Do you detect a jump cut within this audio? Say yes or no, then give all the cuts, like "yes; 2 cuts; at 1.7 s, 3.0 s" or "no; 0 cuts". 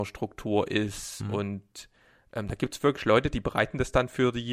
no; 0 cuts